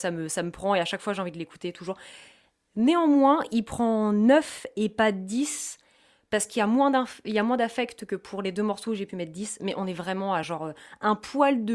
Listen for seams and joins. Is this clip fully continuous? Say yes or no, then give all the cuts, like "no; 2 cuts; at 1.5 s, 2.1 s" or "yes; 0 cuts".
yes; 0 cuts